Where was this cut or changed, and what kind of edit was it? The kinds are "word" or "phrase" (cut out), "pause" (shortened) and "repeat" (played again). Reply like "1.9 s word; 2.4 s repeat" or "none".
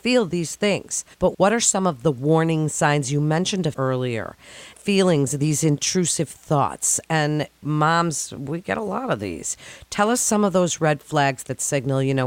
1.1 s pause; 3.7 s word; 4.7 s pause